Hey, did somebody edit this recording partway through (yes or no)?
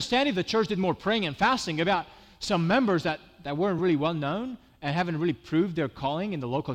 no